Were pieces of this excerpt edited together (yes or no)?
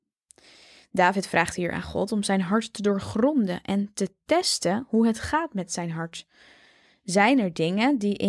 no